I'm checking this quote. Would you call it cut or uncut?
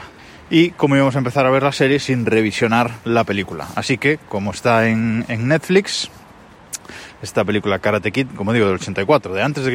uncut